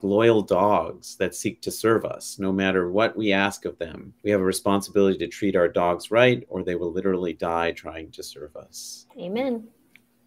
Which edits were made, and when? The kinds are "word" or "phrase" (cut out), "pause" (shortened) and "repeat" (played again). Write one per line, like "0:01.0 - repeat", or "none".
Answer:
0:04.2 - pause